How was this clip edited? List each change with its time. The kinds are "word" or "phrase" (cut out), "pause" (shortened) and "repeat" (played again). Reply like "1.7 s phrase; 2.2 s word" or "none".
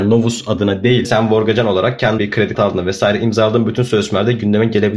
1.0 s word; 2.2 s word; 2.5 s word